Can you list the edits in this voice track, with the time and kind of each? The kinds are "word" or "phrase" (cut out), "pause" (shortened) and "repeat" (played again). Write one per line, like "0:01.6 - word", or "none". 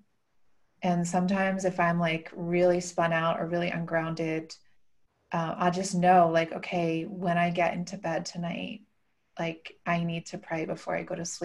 none